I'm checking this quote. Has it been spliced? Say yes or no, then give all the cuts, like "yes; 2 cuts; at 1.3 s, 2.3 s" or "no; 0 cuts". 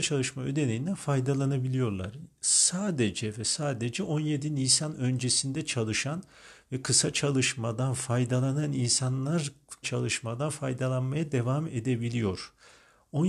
yes; 1 cut; at 9.8 s